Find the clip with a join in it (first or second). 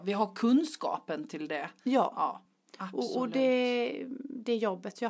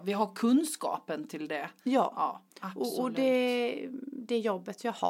second